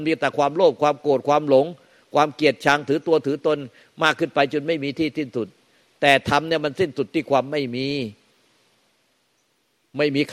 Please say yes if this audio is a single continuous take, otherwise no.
yes